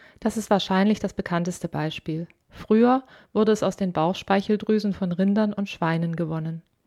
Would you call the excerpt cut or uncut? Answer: cut